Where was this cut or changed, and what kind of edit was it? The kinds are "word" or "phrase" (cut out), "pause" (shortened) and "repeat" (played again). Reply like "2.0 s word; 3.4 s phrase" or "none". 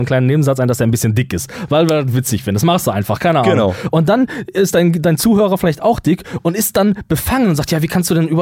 none

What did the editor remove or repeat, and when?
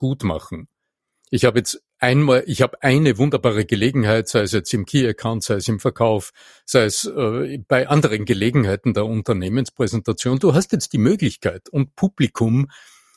none

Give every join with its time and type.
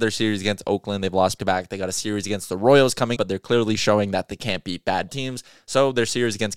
1.4 s word; 3.2 s word; 5.1 s word

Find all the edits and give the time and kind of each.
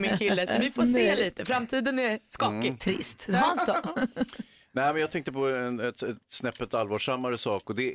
none

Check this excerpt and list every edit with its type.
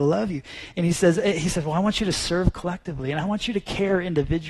none

